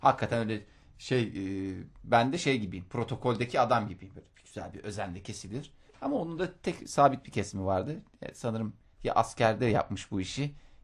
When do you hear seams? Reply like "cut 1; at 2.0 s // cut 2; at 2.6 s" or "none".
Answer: cut 1; at 5.9 s